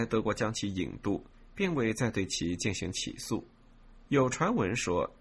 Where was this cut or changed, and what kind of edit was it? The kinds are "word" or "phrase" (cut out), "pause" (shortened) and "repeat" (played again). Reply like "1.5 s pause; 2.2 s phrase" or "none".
4.0 s pause